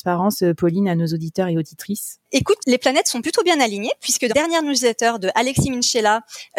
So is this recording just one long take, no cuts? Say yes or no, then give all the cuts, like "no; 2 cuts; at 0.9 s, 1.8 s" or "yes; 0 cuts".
no; 2 cuts; at 2.6 s, 4.3 s